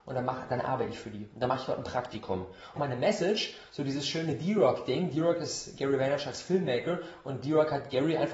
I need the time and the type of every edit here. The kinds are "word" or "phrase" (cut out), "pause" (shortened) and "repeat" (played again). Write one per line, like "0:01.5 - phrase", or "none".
0:02.8 - phrase